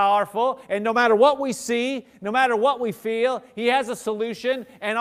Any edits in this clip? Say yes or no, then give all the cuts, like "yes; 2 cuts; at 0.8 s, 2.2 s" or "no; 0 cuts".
no; 0 cuts